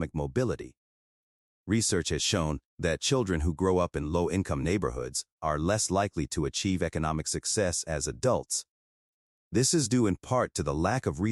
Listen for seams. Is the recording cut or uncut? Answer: uncut